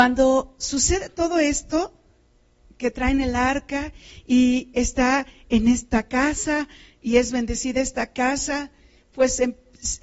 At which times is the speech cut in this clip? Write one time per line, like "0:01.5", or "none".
none